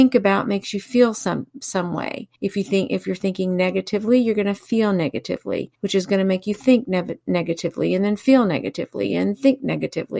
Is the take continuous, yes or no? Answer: no